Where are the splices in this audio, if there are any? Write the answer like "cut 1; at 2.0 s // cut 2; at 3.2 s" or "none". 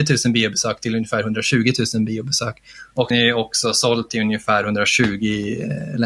cut 1; at 3.1 s